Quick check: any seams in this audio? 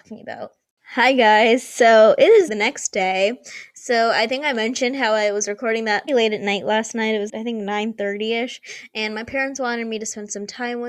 yes; 3 cuts; at 2.5 s, 6.1 s, 7.3 s

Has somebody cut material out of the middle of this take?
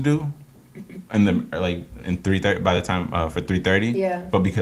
no; 0 cuts

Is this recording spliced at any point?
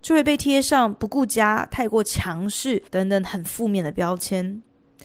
yes; 1 cut; at 2.9 s

